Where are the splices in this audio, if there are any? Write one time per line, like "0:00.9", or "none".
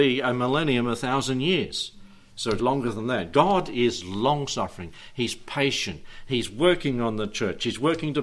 0:02.6